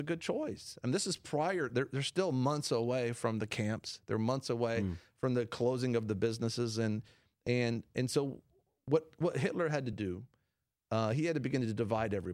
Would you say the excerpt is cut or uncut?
uncut